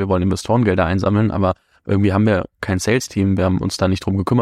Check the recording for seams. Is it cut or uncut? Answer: uncut